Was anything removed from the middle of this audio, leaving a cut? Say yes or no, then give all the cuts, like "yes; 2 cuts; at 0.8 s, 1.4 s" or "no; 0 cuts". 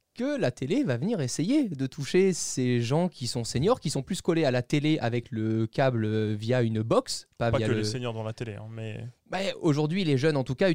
no; 0 cuts